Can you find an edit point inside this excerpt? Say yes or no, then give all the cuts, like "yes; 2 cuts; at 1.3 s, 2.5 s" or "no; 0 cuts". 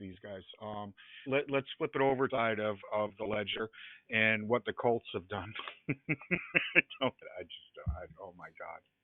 yes; 3 cuts; at 1.3 s, 2.3 s, 7.2 s